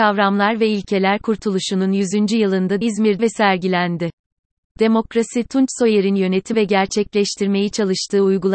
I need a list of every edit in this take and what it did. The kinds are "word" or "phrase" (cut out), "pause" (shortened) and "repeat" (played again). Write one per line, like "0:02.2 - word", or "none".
0:02.8 - word
0:03.2 - word
0:06.5 - word